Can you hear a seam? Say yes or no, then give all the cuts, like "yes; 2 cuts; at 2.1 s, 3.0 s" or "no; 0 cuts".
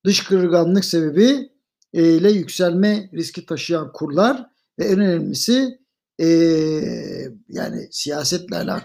no; 0 cuts